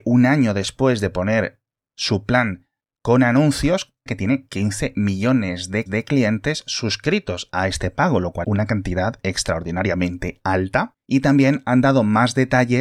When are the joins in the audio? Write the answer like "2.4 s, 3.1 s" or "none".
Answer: 4.1 s, 5.9 s, 8.4 s